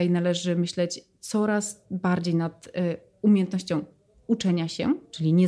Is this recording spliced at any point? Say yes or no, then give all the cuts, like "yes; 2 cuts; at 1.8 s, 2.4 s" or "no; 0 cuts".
no; 0 cuts